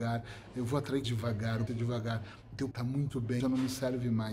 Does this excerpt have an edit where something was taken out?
yes; 4 cuts; at 1.0 s, 1.7 s, 2.7 s, 3.4 s

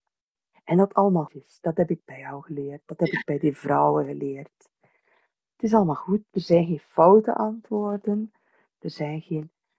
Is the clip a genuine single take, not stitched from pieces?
no; 1 cut; at 1.3 s

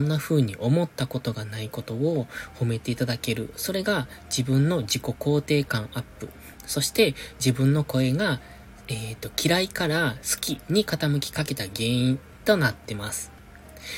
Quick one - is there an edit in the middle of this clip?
no; 0 cuts

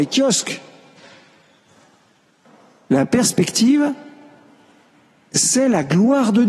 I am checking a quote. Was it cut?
no; 0 cuts

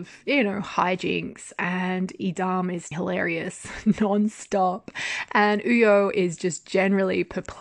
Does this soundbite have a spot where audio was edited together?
yes; 1 cut; at 2.9 s

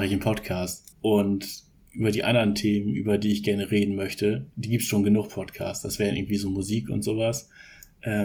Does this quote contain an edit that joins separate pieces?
yes; 1 cut; at 0.9 s

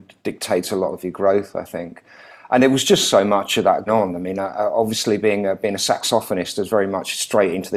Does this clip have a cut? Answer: yes; 1 cut; at 3.9 s

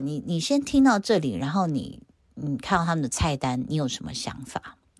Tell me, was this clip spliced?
no; 0 cuts

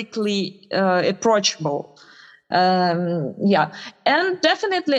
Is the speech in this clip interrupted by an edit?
no; 0 cuts

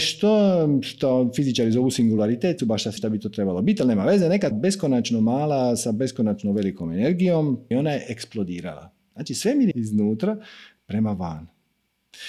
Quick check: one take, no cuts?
no; 5 cuts; at 2.6 s, 3.0 s, 4.5 s, 7.7 s, 9.7 s

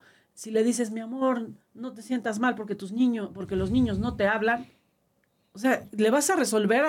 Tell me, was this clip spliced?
no; 0 cuts

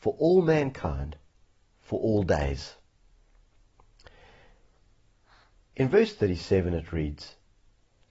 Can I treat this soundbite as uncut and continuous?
yes; 0 cuts

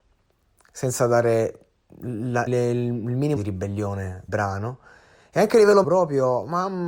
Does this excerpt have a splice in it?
yes; 4 cuts; at 2.5 s, 3.4 s, 4.3 s, 5.8 s

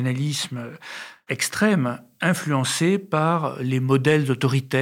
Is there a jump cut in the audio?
no; 0 cuts

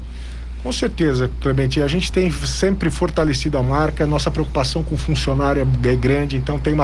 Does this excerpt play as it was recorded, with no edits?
yes; 0 cuts

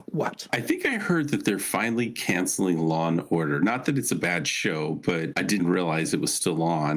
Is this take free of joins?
no; 1 cut; at 5.6 s

